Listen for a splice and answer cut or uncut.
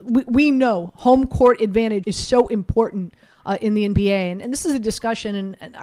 cut